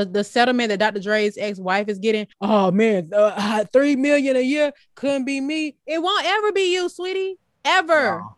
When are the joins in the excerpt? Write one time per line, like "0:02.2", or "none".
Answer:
0:02.3